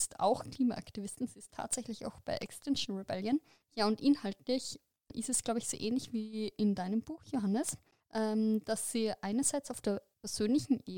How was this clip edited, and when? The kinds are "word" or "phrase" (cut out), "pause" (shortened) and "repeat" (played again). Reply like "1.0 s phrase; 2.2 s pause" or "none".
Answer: none

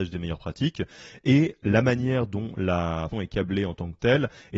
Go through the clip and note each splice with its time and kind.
3.1 s word

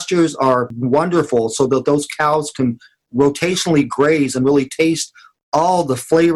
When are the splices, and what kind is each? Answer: none

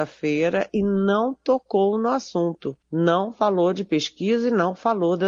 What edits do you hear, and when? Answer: 2.8 s pause

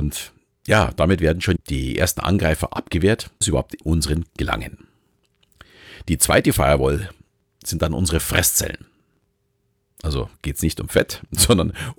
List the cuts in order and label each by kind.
1.6 s word; 3.4 s word; 3.8 s word; 4.3 s word

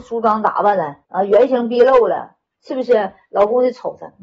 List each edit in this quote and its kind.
1.0 s pause

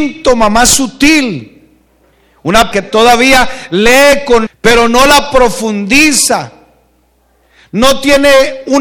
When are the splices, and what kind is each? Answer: 2.7 s word; 4.5 s phrase

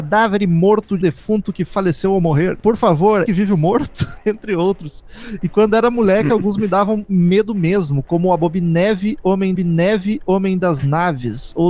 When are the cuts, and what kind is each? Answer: 1.0 s word; 3.3 s phrase; 9.5 s repeat

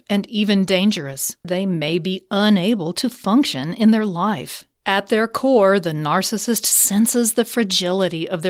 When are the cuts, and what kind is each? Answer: 1.4 s word; 4.7 s pause

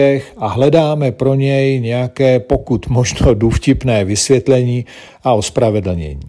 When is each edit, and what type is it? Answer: none

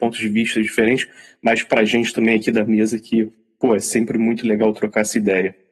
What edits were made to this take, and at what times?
none

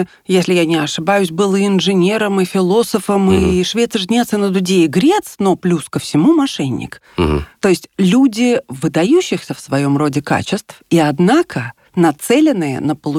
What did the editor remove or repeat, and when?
none

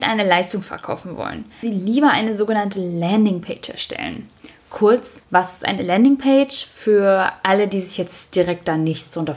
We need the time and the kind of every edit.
1.6 s phrase; 5.2 s pause

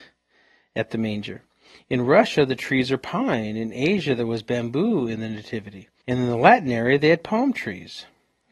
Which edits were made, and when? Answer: none

